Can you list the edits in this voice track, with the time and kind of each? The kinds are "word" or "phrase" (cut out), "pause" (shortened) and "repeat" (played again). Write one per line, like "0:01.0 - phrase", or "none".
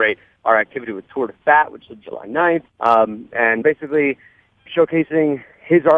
0:01.9 - word
0:02.7 - pause
0:03.6 - phrase
0:04.7 - word